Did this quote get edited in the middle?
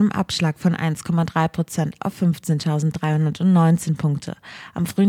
no; 0 cuts

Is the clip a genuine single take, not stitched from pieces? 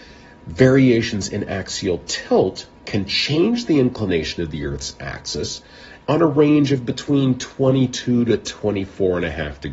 no; 1 cut; at 2.8 s

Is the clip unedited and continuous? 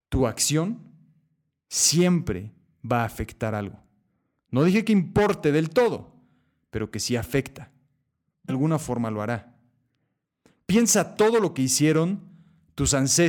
no; 1 cut; at 8.5 s

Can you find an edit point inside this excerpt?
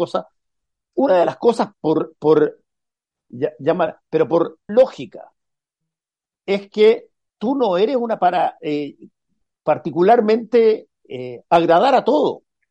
yes; 4 cuts; at 1.7 s, 4.7 s, 7.3 s, 8.2 s

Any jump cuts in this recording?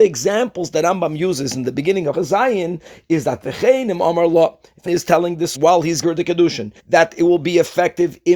yes; 5 cuts; at 2.1 s, 4.9 s, 5.5 s, 6.0 s, 6.8 s

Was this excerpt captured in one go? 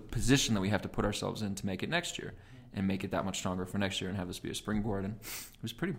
yes; 0 cuts

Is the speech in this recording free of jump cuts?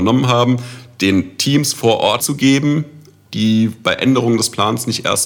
no; 1 cut; at 2.2 s

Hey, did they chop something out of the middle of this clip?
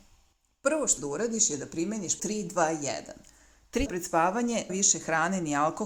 yes; 4 cuts; at 1.0 s, 2.2 s, 3.9 s, 4.7 s

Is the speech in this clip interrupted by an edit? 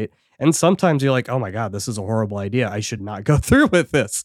no; 0 cuts

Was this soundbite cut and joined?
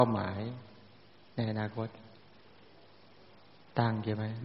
no; 0 cuts

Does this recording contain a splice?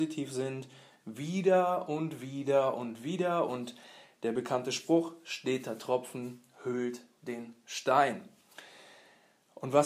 no; 0 cuts

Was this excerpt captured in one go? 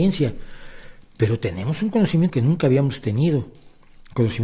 no; 1 cut; at 2.3 s

